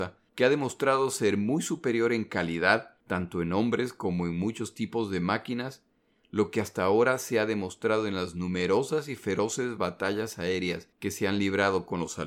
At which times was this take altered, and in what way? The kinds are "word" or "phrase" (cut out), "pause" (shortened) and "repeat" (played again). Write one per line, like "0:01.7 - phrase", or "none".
none